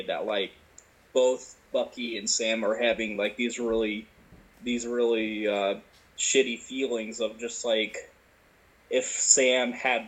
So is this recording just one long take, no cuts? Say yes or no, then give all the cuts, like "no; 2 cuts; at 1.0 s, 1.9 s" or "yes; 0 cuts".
yes; 0 cuts